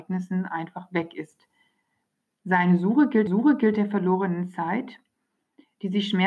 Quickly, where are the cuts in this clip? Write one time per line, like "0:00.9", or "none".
0:03.3